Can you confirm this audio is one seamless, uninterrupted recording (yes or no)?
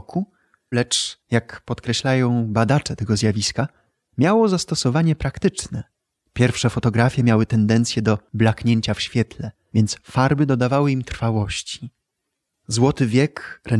yes